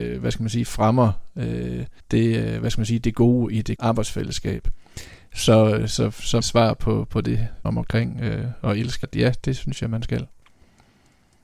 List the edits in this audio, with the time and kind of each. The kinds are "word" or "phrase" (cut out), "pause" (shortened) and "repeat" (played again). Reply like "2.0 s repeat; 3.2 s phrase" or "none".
2.0 s pause; 3.8 s word; 6.4 s phrase; 7.7 s phrase; 9.0 s phrase